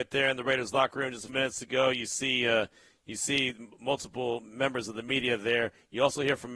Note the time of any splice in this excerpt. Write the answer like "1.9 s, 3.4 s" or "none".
1.3 s